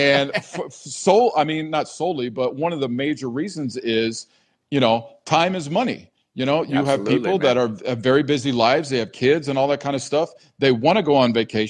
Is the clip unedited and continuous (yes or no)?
yes